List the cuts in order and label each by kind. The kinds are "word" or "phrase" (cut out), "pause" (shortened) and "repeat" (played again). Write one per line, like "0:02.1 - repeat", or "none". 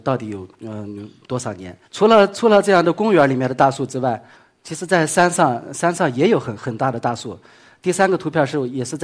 0:01.8 - pause

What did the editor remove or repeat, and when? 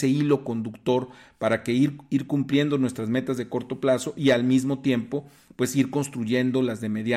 none

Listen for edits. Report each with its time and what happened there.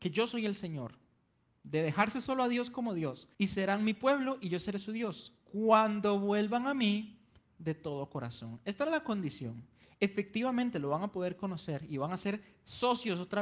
0:03.3 - pause

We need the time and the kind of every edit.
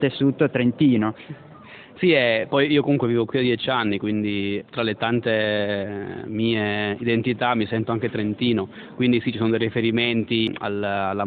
0:04.6 - word

